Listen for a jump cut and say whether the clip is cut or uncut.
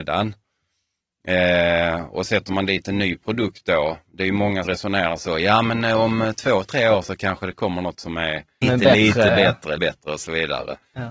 cut